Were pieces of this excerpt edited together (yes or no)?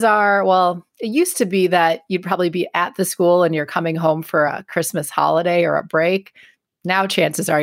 no